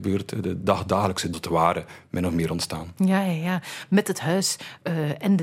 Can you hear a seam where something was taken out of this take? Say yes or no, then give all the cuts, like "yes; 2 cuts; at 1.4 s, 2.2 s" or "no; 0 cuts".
yes; 1 cut; at 1.3 s